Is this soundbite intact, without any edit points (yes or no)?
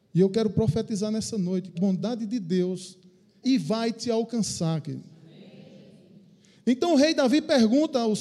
no